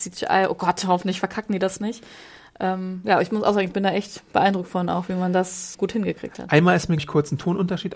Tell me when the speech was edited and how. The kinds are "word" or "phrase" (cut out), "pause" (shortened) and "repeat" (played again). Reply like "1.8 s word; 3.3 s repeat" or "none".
5.7 s word; 7.0 s word